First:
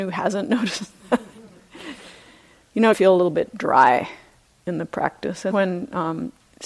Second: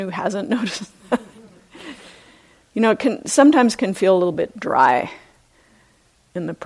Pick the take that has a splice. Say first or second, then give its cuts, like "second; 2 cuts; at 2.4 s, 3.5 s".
first; 3 cuts; at 2.9 s, 4.4 s, 5.5 s